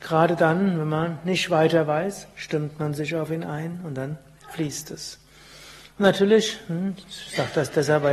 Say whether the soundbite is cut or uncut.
uncut